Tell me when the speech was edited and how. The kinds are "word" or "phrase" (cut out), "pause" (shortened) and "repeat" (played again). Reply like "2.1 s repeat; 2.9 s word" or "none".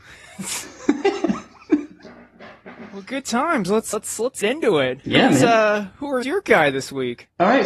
3.9 s word; 4.4 s word; 6.2 s word